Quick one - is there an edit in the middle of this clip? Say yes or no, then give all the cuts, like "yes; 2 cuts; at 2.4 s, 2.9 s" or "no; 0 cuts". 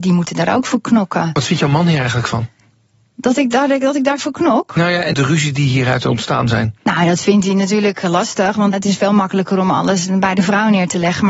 yes; 2 cuts; at 5.1 s, 8.7 s